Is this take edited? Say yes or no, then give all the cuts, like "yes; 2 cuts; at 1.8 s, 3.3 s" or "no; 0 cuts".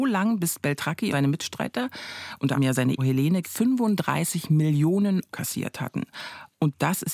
yes; 5 cuts; at 1.1 s, 2.5 s, 3.0 s, 3.4 s, 5.3 s